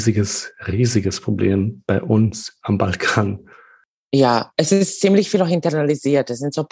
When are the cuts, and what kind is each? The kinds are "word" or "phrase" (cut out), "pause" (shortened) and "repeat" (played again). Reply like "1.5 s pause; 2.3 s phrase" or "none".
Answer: none